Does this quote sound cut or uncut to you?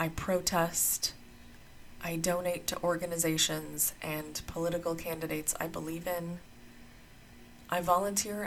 uncut